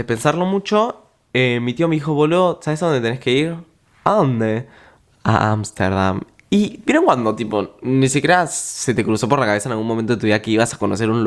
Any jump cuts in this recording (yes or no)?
no